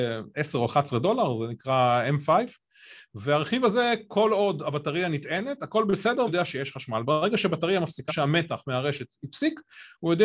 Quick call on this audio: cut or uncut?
cut